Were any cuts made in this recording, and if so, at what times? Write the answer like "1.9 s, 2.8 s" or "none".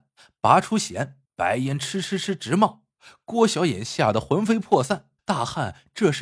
1.2 s, 5.2 s